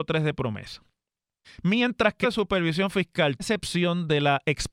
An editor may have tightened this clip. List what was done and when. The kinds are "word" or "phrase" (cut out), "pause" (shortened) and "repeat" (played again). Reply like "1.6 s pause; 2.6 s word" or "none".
1.4 s pause; 2.2 s phrase; 3.4 s word